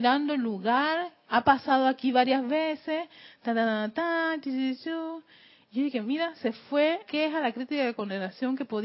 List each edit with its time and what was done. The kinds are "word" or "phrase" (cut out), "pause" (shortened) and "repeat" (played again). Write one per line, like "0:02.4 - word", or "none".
0:07.0 - word